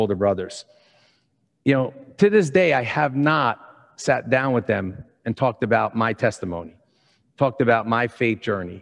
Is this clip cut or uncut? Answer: uncut